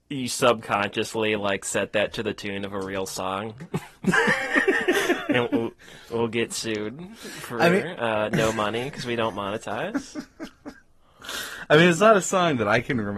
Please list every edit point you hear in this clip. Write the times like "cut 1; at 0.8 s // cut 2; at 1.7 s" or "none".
none